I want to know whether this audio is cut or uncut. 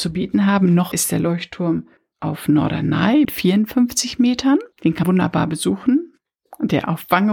cut